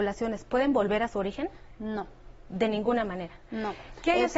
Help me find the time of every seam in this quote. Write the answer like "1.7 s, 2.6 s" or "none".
none

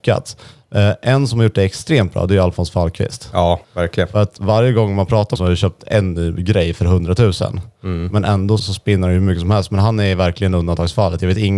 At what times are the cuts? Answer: 3.6 s, 5.4 s, 8.6 s

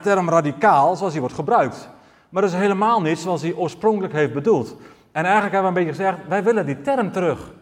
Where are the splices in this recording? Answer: none

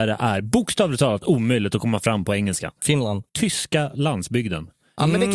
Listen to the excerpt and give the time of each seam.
3.3 s

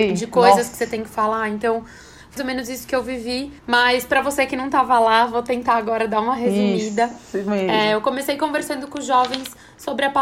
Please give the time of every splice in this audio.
2.4 s, 3.6 s

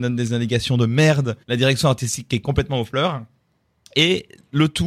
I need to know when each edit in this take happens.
1.4 s

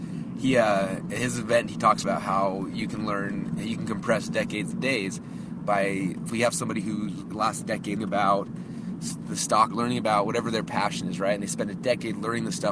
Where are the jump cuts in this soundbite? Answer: 2.0 s, 4.7 s, 6.3 s, 7.3 s, 8.0 s, 9.7 s

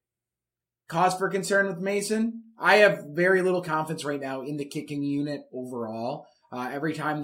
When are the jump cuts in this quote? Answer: none

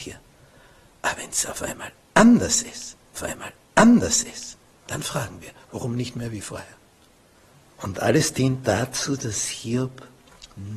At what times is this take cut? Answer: 3.2 s, 7.3 s

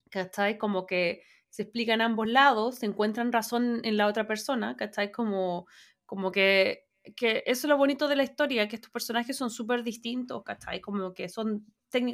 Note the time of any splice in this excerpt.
none

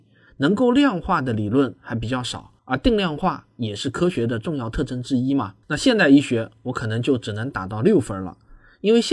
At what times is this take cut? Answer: 2.6 s, 5.6 s

